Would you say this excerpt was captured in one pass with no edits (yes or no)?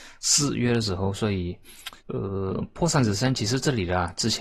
no